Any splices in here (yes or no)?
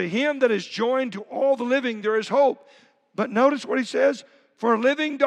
no